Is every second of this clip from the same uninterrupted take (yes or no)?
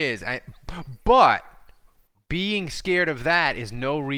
no